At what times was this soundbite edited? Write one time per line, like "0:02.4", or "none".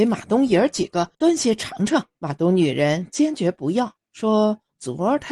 0:01.1
0:02.1
0:04.0